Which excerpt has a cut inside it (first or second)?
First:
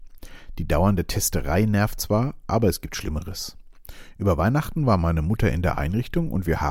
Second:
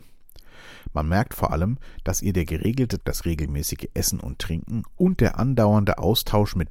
second